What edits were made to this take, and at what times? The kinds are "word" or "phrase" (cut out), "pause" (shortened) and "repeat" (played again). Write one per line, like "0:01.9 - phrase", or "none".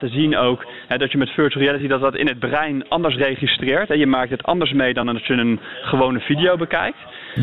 none